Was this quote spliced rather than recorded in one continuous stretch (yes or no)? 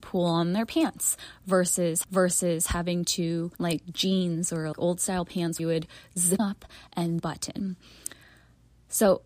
yes